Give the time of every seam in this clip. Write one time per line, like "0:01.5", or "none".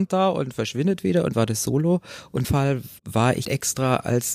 0:01.3
0:02.4
0:03.0
0:03.4